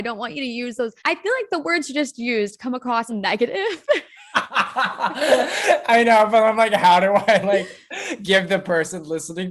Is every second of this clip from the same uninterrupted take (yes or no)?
no